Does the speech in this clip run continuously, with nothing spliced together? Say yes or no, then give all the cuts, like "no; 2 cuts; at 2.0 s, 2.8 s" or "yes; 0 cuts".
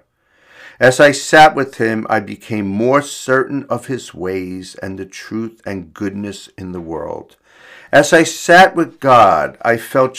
yes; 0 cuts